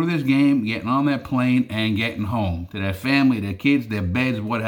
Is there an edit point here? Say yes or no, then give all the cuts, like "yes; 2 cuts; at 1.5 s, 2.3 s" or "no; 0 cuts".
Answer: no; 0 cuts